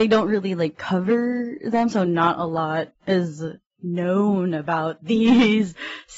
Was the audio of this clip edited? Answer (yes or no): yes